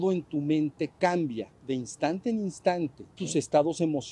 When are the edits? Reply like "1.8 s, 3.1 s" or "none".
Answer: 3.2 s